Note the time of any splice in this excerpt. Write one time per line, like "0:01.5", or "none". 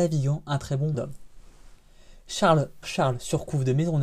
0:00.9
0:02.8